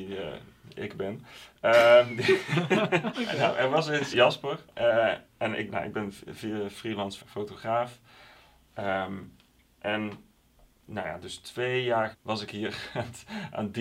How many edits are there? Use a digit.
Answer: 5